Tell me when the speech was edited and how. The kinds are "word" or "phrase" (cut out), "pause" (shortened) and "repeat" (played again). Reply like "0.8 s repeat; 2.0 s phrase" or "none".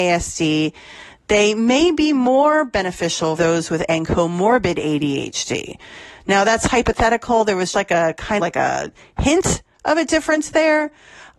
3.4 s word; 3.9 s word; 7.7 s word; 8.4 s word